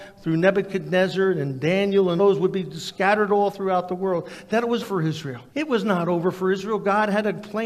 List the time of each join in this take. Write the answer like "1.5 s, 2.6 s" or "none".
2.2 s, 4.8 s, 5.5 s